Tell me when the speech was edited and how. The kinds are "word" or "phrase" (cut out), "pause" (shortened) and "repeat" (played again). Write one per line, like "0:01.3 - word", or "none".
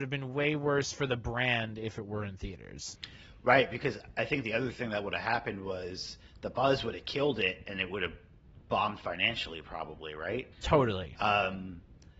0:10.5 - pause